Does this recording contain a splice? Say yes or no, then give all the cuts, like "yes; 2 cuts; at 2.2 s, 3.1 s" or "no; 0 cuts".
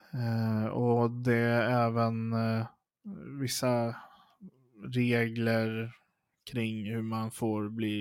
no; 0 cuts